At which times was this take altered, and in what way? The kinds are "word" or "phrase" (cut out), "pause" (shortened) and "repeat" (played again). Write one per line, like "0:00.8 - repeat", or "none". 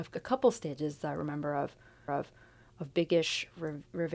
0:02.1 - repeat